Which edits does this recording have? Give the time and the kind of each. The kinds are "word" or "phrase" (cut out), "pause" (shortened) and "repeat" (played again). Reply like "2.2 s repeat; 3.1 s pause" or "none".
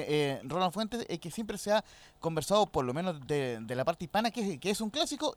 none